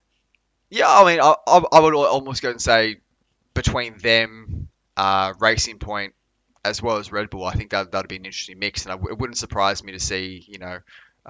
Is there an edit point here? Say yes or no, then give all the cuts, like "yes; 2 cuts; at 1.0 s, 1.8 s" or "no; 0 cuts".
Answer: no; 0 cuts